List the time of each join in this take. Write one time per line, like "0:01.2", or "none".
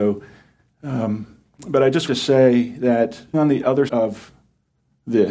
0:02.1
0:03.3
0:03.9